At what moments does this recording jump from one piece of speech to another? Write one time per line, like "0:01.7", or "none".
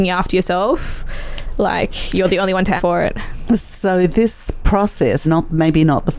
0:02.8
0:05.2